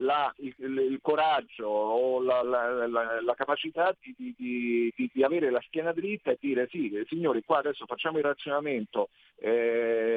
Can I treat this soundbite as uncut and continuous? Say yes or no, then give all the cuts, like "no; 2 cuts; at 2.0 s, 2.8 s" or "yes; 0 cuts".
no; 2 cuts; at 2.4 s, 4.0 s